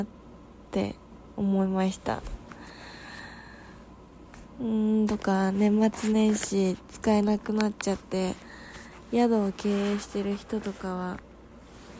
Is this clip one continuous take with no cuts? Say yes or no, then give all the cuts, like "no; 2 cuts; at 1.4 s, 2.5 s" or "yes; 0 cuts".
no; 1 cut; at 5.1 s